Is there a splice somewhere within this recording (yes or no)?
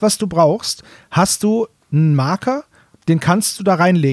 no